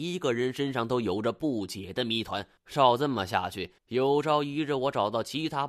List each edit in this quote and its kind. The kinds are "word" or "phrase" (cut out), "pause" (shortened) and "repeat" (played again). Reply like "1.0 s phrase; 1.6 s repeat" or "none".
2.6 s pause; 3.8 s pause

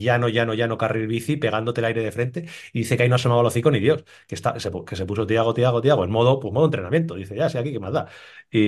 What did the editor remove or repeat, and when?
none

